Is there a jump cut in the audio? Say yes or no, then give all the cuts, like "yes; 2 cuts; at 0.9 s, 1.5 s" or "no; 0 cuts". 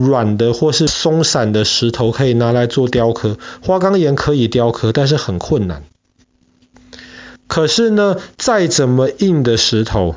yes; 1 cut; at 7.4 s